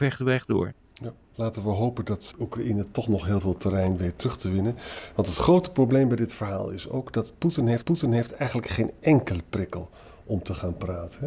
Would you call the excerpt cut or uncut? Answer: cut